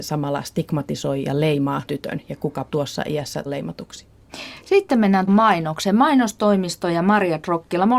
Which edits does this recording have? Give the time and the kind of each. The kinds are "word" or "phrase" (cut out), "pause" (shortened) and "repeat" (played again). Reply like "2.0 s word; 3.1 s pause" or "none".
1.9 s word; 2.7 s word; 3.5 s word; 5.3 s word